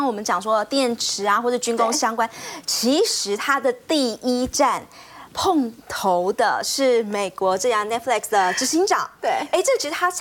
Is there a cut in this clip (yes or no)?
no